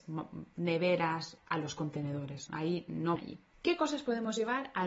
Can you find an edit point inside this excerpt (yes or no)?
yes